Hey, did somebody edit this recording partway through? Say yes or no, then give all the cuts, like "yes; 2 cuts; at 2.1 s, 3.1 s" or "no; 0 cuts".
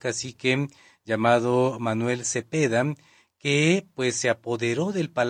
no; 0 cuts